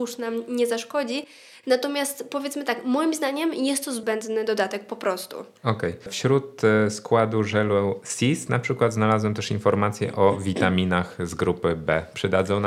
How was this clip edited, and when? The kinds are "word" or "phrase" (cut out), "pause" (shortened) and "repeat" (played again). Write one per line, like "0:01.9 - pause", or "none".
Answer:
none